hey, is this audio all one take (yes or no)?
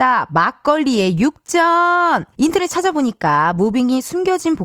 no